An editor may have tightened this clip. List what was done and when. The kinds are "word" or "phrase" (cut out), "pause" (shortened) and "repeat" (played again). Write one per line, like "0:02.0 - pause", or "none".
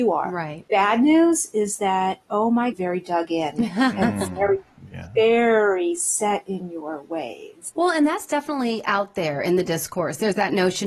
0:02.7 - phrase